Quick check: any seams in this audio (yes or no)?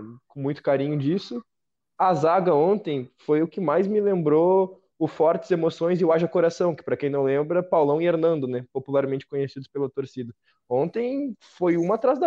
no